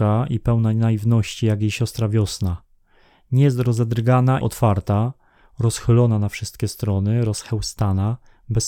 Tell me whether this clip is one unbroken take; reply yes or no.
no